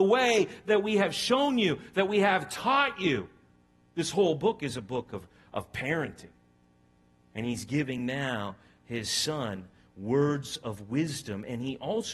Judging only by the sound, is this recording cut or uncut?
uncut